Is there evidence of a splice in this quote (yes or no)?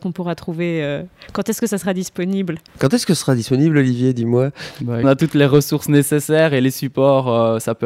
yes